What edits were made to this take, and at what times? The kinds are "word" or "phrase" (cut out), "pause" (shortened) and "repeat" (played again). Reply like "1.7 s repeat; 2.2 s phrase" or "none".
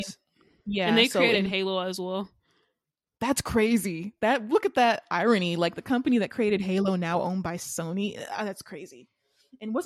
none